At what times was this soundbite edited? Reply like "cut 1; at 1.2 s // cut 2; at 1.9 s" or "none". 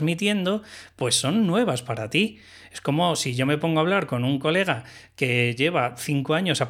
none